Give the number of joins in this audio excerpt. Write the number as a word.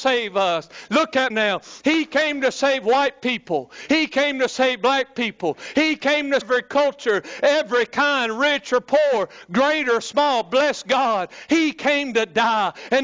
two